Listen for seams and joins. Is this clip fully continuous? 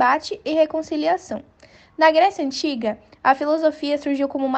yes; 0 cuts

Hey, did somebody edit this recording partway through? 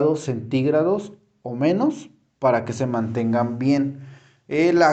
no; 0 cuts

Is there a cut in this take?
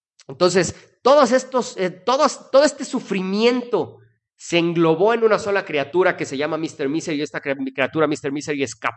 no; 0 cuts

